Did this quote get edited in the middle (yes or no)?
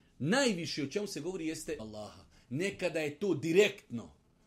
yes